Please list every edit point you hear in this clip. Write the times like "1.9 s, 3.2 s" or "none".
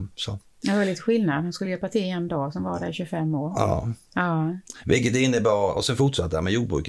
none